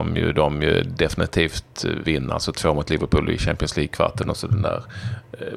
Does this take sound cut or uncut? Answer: cut